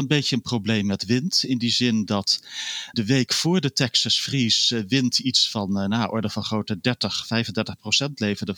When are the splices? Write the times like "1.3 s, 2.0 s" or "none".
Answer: 2.9 s